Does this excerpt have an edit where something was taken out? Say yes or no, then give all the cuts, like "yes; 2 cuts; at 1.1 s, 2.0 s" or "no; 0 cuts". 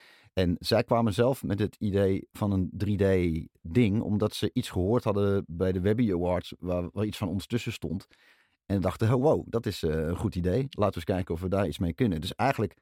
no; 0 cuts